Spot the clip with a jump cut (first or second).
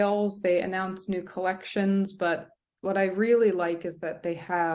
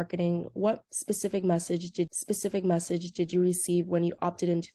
second